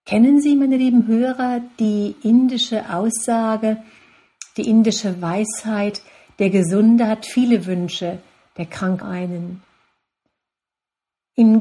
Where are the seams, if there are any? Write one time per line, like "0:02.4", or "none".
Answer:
0:09.0